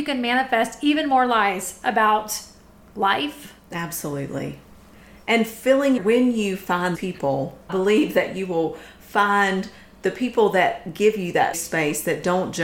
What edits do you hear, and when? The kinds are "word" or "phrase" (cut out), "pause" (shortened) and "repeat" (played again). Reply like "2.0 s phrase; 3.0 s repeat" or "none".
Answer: 6.0 s word; 6.9 s word; 7.7 s word; 11.5 s word